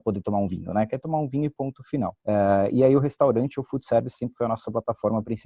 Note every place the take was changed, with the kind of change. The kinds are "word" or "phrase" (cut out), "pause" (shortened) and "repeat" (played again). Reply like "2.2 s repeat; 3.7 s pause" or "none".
2.2 s pause